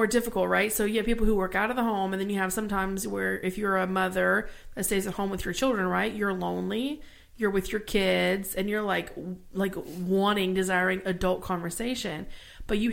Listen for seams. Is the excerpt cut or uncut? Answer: uncut